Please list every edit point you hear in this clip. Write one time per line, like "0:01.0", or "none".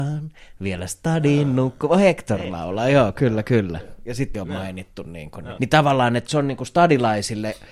0:04.3
0:05.6
0:06.3